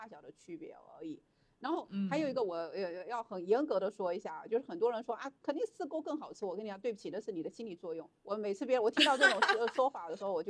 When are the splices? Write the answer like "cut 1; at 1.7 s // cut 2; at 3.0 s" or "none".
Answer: cut 1; at 8.2 s